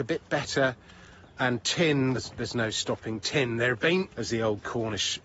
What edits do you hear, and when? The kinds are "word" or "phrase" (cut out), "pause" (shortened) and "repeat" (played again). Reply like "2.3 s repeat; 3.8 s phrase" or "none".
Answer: 2.1 s word; 4.1 s word